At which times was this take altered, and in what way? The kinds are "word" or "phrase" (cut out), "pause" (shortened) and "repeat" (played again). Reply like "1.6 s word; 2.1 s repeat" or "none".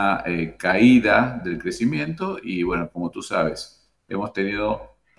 none

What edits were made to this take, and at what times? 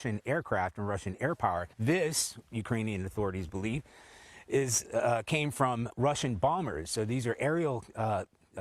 1.7 s pause; 5.9 s word

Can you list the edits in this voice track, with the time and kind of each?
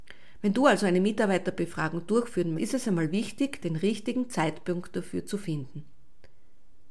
2.6 s word

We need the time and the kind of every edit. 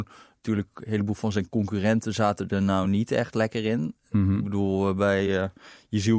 none

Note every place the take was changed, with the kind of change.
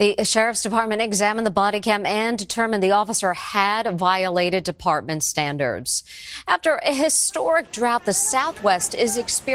none

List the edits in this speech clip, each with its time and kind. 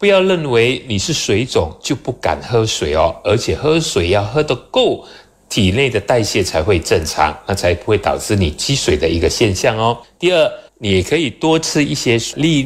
10.7 s pause

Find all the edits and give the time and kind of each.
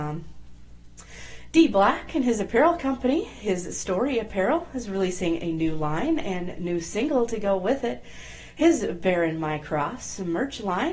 none

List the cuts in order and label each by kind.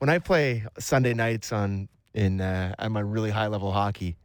none

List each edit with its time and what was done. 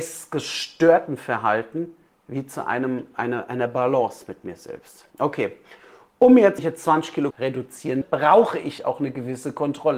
2.1 s pause; 5.1 s pause; 6.6 s word; 7.3 s word; 8.0 s word; 8.8 s word

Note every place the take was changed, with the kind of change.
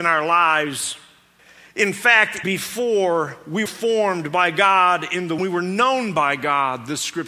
1.4 s pause; 2.4 s word; 3.7 s word; 5.4 s word

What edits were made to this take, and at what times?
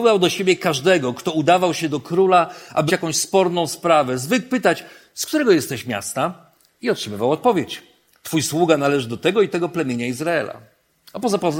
2.9 s word

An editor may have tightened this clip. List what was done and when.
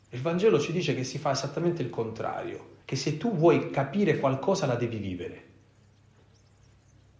2.8 s pause

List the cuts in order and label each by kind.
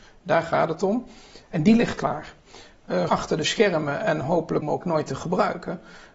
3.1 s word; 4.6 s phrase

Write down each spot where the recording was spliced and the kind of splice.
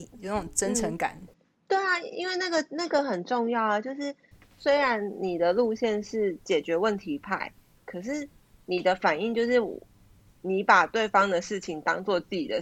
none

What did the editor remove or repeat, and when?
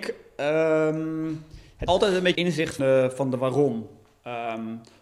1.9 s word; 2.3 s word; 2.8 s word

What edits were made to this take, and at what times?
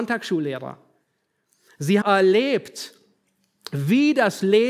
2.0 s word

